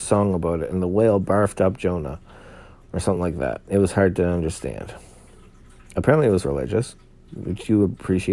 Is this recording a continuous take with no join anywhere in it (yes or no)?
yes